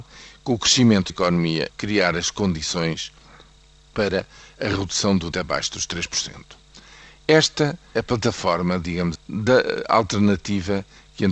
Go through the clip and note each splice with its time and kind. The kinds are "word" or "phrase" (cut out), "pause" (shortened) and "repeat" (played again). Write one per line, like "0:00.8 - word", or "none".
0:01.1 - word
0:01.7 - word
0:05.3 - word
0:08.0 - word
0:09.2 - word